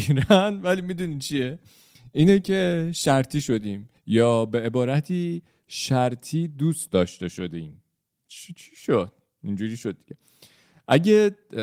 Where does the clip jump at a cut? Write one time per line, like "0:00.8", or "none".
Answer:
0:04.0

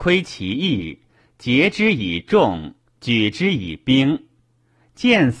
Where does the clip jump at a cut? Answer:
none

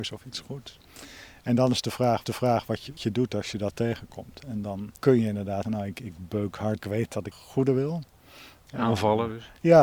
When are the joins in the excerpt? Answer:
0:02.2
0:03.0
0:05.0
0:05.6
0:06.8
0:07.3

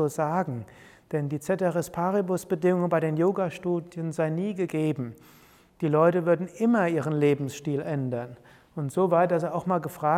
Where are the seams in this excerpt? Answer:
none

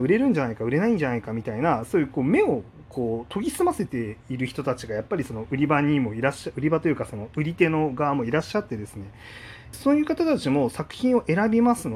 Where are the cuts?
0:09.7

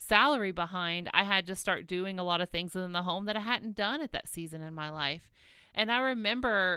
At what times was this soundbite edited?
none

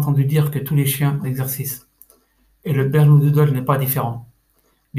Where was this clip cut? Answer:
0:01.2

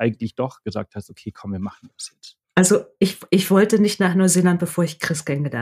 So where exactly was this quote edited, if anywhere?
0:02.4

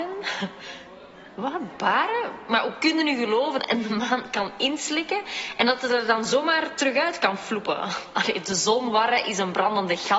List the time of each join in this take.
0:03.6

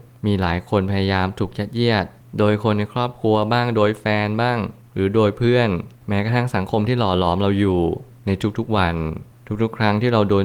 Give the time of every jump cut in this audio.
none

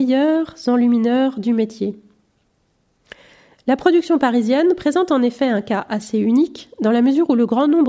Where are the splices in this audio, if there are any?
none

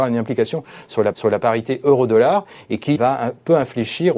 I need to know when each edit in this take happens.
0:01.1
0:03.0

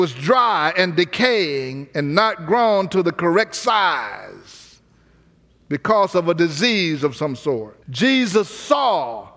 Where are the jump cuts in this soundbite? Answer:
0:07.8

